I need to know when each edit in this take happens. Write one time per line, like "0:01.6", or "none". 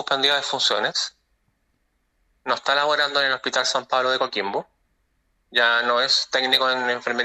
none